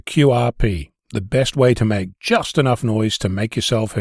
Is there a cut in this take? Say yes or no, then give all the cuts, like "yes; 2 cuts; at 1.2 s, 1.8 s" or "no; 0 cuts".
no; 0 cuts